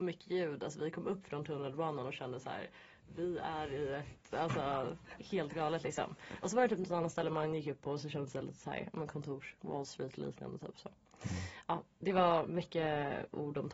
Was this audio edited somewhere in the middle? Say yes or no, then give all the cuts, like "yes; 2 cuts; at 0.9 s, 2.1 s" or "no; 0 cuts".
no; 0 cuts